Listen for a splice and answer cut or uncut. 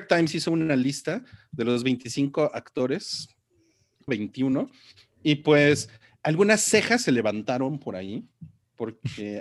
cut